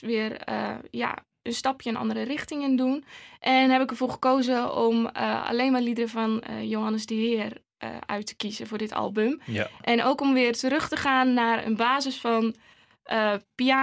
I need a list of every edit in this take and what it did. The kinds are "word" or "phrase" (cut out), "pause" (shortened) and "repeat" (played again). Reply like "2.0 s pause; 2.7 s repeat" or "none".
none